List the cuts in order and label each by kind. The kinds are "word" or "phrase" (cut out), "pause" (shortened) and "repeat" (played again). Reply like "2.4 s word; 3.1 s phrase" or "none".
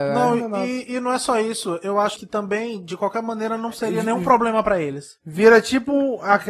2.2 s word